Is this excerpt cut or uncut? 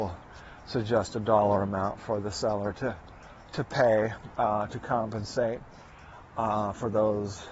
uncut